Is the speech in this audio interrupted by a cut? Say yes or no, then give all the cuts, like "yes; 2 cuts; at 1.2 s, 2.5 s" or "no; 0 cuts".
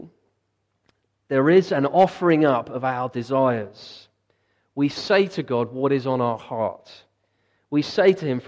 no; 0 cuts